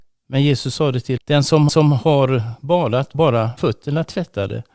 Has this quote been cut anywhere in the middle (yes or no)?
yes